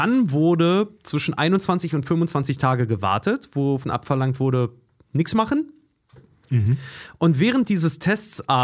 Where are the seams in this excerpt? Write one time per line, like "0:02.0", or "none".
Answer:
0:03.8